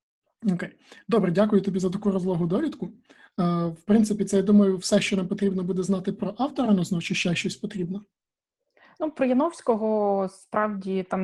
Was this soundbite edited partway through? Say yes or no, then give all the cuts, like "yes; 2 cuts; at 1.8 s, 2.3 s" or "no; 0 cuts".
no; 0 cuts